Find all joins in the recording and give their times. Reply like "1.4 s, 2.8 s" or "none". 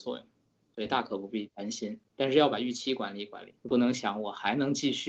3.6 s